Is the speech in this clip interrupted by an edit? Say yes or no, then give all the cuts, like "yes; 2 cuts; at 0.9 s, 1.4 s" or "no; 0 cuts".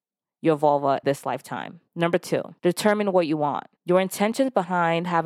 yes; 4 cuts; at 1.0 s, 1.9 s, 2.6 s, 3.8 s